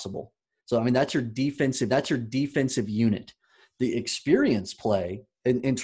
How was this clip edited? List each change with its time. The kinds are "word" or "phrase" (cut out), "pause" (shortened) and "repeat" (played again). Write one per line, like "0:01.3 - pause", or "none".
0:01.9 - repeat

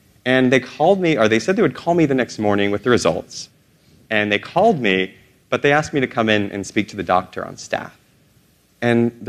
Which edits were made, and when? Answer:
none

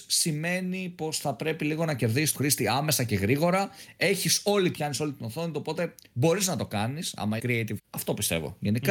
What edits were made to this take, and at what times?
0:02.3 - phrase
0:04.7 - phrase
0:07.4 - word
0:07.8 - word

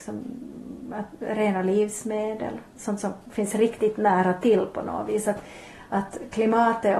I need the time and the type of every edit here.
none

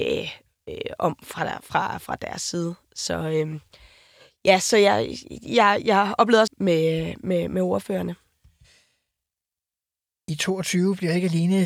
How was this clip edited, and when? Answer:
0:06.5 - phrase

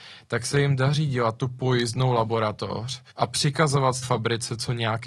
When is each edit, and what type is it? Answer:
0:03.1 - pause
0:04.0 - word

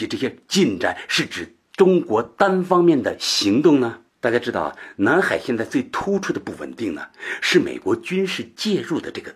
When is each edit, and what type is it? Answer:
0:04.1 - pause

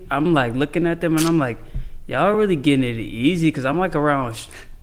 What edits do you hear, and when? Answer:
none

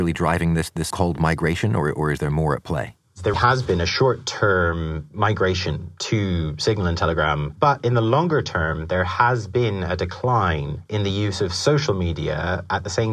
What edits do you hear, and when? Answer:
0:00.9 - word
0:03.3 - word

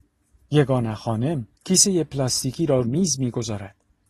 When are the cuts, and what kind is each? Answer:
0:01.5 - pause
0:02.8 - word

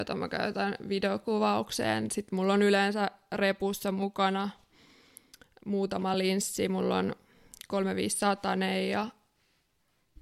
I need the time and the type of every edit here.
none

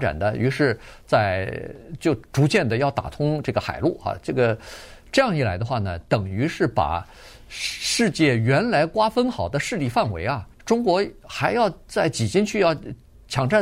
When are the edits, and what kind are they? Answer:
0:10.5 - pause

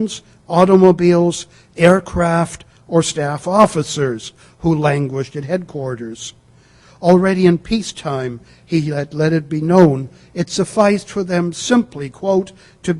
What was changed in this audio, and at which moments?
none

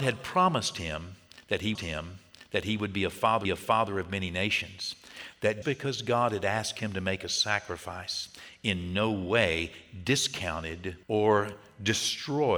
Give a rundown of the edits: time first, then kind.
0:01.7 - repeat
0:03.4 - repeat
0:05.6 - word
0:11.0 - pause

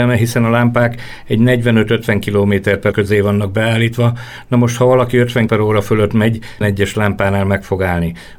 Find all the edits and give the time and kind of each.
0:02.9 - word
0:05.5 - word
0:06.6 - word

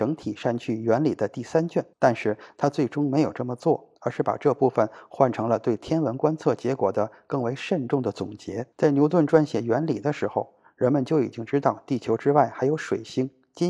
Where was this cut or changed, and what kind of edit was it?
0:01.9 - pause
0:04.0 - pause
0:08.7 - pause

